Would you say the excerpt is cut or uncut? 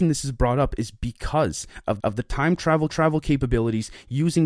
cut